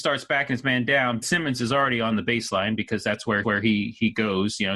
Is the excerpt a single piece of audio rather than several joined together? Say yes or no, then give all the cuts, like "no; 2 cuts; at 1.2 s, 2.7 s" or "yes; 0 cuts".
no; 2 cuts; at 1.2 s, 3.4 s